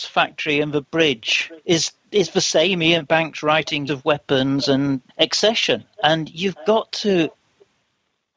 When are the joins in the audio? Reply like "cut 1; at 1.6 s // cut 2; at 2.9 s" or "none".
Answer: cut 1; at 1.6 s // cut 2; at 3.9 s // cut 3; at 5.1 s